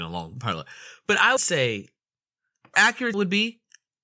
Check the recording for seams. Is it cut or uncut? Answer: cut